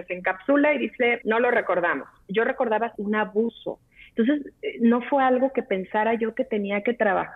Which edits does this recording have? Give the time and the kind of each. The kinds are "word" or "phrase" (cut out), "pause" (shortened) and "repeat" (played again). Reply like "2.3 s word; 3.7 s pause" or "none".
1.2 s word; 2.9 s word